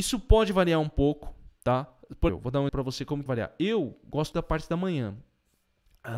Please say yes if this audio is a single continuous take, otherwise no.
no